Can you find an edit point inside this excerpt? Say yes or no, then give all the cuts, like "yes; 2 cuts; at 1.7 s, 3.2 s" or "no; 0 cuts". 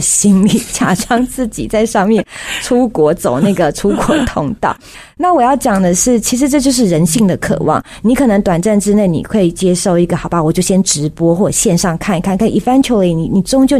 no; 0 cuts